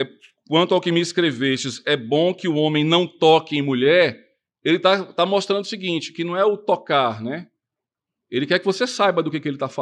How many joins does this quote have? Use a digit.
0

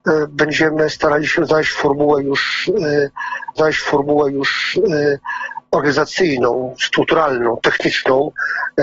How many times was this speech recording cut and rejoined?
1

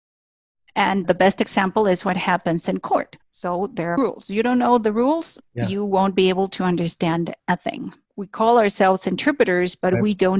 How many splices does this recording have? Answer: 4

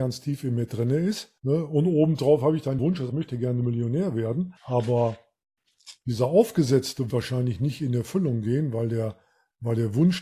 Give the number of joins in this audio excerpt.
5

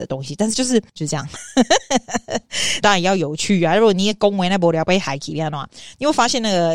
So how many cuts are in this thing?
2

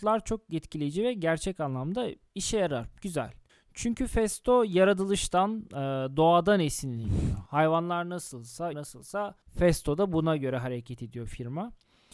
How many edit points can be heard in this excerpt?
3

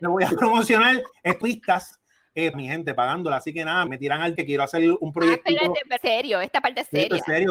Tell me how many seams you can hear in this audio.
5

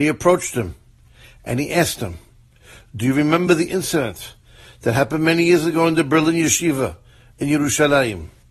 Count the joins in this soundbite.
0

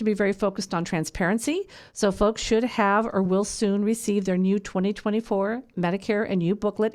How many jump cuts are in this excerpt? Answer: 0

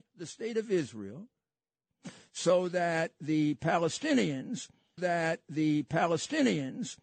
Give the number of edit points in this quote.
1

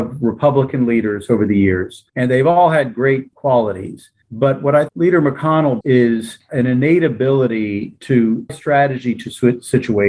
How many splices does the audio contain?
5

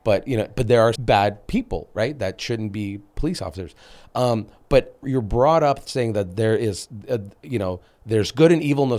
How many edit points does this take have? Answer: 2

